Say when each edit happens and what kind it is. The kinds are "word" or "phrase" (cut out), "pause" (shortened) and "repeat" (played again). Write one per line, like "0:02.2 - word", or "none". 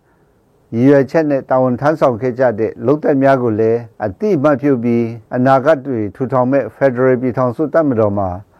0:03.9 - pause
0:05.3 - pause